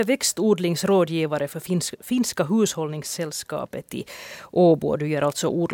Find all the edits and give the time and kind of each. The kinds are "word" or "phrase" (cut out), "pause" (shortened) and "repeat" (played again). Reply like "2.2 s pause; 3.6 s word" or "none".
none